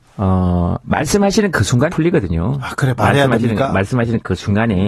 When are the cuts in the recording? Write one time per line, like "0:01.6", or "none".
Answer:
0:01.9